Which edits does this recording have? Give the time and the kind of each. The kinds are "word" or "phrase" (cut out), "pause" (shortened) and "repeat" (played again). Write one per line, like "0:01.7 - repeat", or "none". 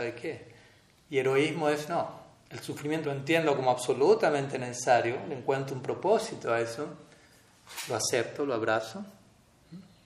0:03.0 - phrase